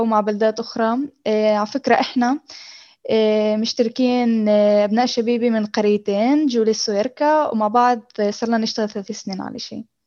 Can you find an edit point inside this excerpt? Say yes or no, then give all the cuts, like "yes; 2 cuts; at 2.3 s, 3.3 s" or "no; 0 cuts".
no; 0 cuts